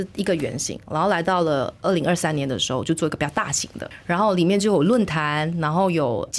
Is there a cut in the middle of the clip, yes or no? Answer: no